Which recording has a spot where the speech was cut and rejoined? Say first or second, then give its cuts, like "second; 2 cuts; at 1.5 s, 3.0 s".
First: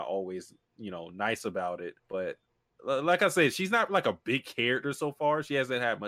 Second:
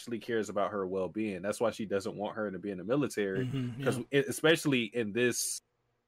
first; 1 cut; at 2.0 s